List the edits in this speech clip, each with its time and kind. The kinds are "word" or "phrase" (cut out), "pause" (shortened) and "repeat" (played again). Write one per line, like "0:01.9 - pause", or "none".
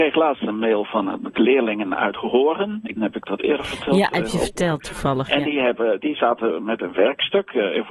0:03.0 - word